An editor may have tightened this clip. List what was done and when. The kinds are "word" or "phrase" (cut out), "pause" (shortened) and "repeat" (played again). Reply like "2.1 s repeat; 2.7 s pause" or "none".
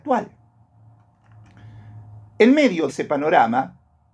2.3 s pause; 2.9 s word

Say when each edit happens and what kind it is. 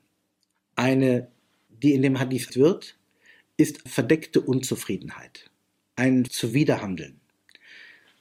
1.7 s word; 2.5 s word; 3.9 s word; 6.3 s word

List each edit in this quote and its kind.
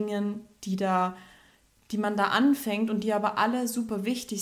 none

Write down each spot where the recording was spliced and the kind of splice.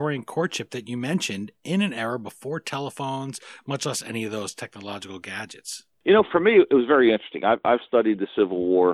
5.9 s pause

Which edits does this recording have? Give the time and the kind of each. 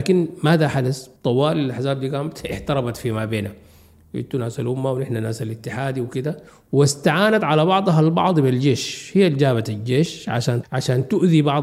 1.2 s pause; 6.5 s pause; 10.6 s word

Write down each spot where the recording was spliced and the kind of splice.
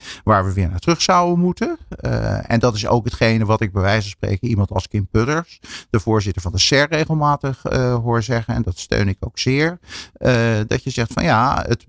none

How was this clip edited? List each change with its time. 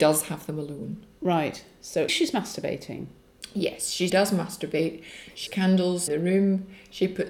2.1 s word; 4.1 s phrase; 5.5 s word; 6.1 s word

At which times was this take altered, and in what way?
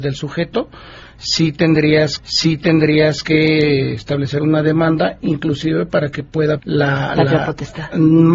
2.2 s repeat; 6.6 s word

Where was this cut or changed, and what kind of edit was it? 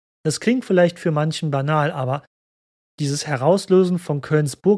none

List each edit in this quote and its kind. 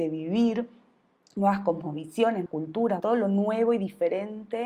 2.5 s word; 3.0 s word

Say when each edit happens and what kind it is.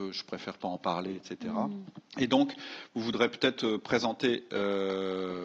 2.1 s pause

